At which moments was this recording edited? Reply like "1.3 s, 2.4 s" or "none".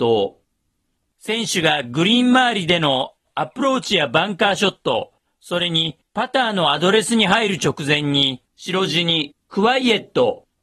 8.5 s